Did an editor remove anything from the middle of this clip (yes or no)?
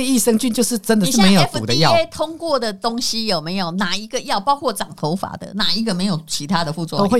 no